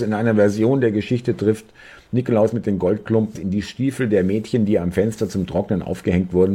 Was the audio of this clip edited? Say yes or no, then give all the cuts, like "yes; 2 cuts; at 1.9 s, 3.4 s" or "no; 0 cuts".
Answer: yes; 1 cut; at 3.4 s